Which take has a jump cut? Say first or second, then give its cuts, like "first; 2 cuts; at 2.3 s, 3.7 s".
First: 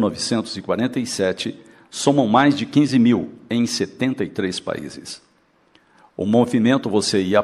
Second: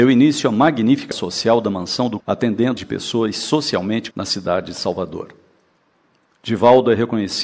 second; 4 cuts; at 1.1 s, 2.2 s, 2.8 s, 4.1 s